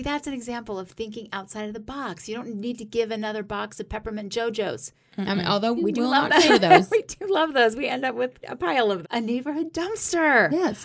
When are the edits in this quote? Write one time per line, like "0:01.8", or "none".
0:05.8
0:06.5
0:08.4
0:09.0